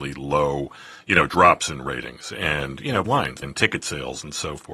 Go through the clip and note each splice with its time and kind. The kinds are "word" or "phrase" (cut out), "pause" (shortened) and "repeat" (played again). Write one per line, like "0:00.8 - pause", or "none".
0:01.3 - word
0:03.0 - word
0:03.4 - word